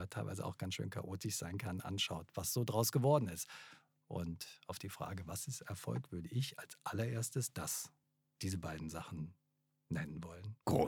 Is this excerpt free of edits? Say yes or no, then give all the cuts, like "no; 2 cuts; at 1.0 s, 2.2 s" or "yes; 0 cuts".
yes; 0 cuts